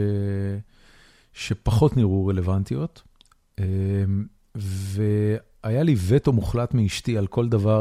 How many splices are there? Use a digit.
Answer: 0